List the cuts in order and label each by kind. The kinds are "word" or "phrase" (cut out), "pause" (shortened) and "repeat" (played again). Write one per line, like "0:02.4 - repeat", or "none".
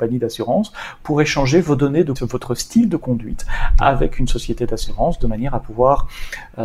0:02.1 - word